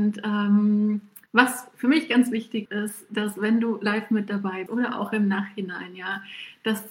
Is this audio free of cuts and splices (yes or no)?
no